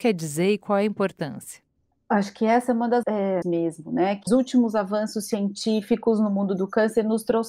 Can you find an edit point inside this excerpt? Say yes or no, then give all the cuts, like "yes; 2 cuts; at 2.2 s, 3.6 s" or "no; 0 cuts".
yes; 3 cuts; at 3.0 s, 3.4 s, 4.3 s